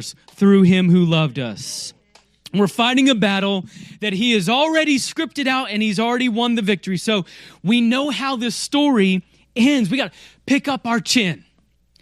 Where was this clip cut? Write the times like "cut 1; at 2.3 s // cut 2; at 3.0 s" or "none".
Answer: none